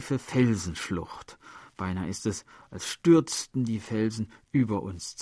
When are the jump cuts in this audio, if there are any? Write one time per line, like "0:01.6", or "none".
none